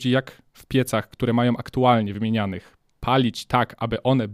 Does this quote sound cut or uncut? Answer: uncut